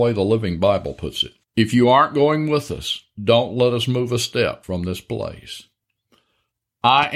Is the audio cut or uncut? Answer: cut